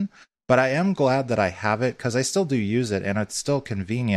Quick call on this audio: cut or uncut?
uncut